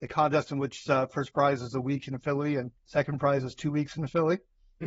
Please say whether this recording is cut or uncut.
cut